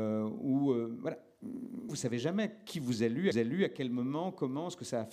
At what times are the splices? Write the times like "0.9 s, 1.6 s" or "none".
1.9 s, 3.3 s